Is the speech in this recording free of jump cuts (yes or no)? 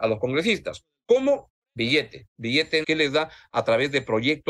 no